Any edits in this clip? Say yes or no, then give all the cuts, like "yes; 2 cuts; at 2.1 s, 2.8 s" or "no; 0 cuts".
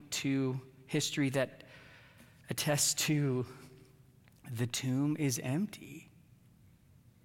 no; 0 cuts